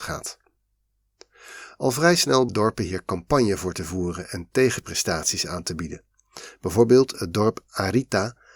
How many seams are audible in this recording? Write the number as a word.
one